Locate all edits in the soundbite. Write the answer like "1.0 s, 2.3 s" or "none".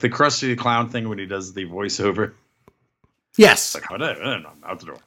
3.9 s